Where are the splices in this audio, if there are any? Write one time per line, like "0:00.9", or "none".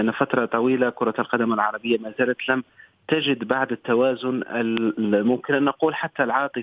none